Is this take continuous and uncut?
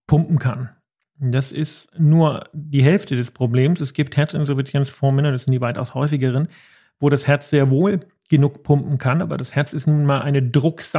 yes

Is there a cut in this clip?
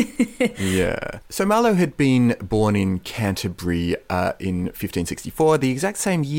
no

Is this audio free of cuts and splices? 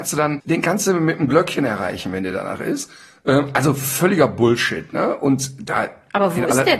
yes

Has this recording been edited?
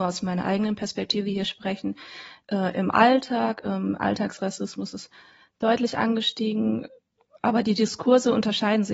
no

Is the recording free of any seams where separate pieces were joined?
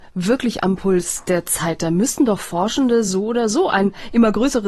yes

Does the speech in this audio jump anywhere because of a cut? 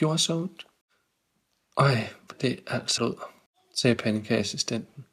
yes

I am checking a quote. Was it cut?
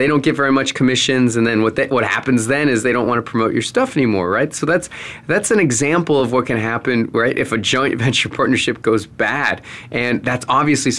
no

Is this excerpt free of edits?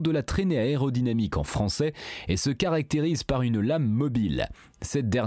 yes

